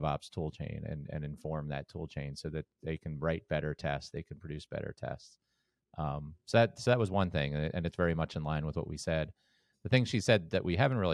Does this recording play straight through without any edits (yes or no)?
yes